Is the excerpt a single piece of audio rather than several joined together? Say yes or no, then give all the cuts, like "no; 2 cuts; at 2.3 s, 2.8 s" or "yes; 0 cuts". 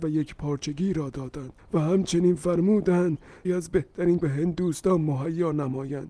no; 3 cuts; at 1.6 s, 3.4 s, 4.2 s